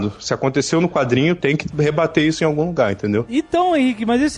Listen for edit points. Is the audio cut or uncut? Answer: uncut